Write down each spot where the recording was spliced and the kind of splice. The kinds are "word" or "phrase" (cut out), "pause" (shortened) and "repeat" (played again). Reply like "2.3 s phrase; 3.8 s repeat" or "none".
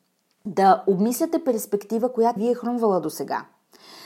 2.4 s word